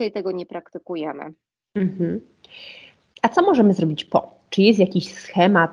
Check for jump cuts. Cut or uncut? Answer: uncut